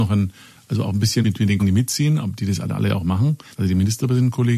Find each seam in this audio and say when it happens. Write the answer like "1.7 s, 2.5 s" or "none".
1.2 s, 1.6 s, 3.5 s